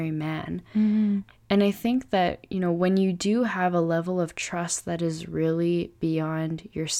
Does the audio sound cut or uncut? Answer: uncut